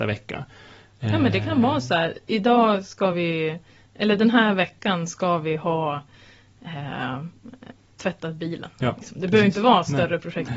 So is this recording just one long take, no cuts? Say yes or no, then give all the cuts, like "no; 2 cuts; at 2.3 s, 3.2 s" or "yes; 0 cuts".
yes; 0 cuts